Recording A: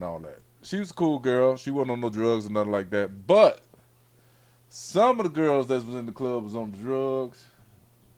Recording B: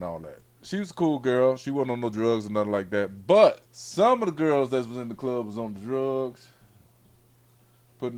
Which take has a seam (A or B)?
B